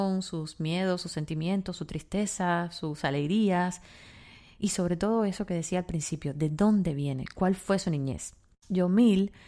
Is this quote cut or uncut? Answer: uncut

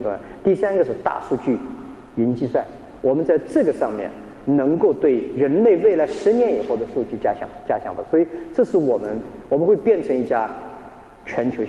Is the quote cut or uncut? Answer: uncut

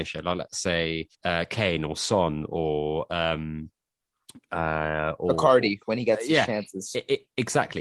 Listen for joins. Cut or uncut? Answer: cut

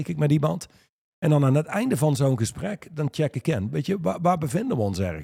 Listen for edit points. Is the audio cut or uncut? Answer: uncut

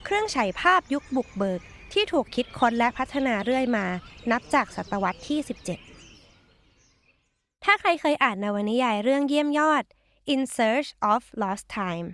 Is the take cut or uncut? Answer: uncut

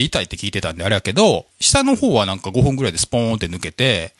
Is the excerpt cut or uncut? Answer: cut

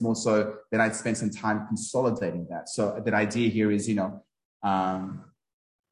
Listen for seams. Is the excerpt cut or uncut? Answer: uncut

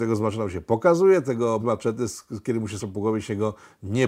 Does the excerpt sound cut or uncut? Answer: cut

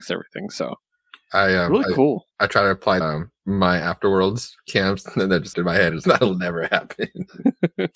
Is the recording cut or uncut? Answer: cut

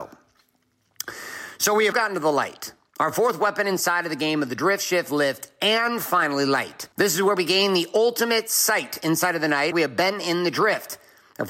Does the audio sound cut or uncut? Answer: cut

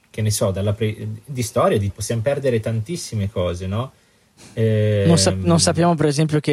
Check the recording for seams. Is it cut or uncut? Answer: cut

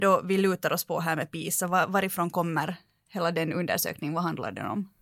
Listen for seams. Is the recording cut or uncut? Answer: uncut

